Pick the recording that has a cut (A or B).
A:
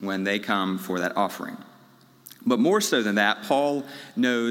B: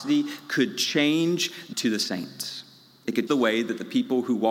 B